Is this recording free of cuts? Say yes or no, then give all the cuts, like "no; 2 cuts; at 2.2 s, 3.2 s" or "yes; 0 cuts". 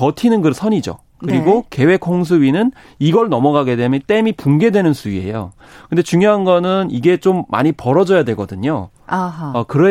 yes; 0 cuts